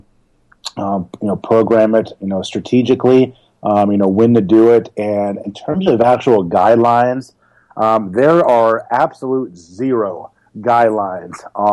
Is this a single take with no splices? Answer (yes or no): yes